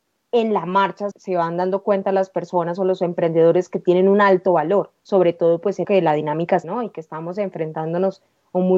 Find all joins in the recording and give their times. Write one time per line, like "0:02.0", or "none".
0:01.1
0:05.0
0:05.8
0:06.6